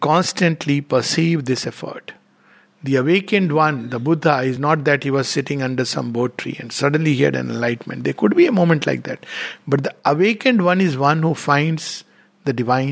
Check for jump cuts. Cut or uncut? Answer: uncut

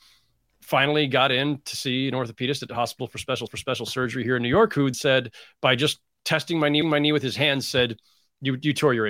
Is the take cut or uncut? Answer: cut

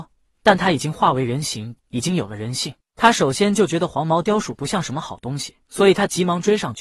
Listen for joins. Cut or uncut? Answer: cut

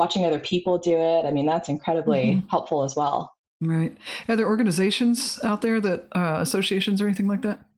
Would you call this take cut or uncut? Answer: cut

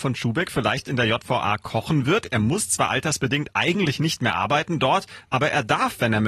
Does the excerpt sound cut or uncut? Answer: uncut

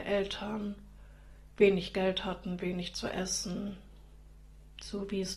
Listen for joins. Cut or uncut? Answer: uncut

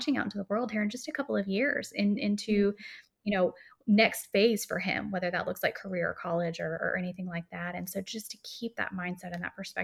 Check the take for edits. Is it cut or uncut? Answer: uncut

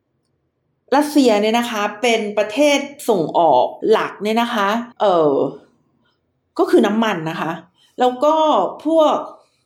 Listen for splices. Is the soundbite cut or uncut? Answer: cut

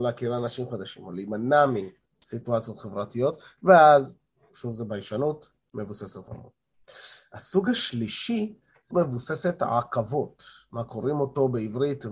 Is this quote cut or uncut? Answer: cut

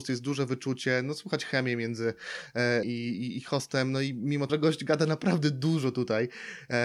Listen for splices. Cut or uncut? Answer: cut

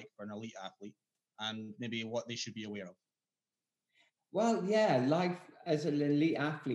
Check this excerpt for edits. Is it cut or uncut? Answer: uncut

